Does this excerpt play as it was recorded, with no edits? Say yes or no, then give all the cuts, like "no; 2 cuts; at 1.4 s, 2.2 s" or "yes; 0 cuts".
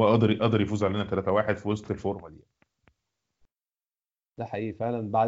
yes; 0 cuts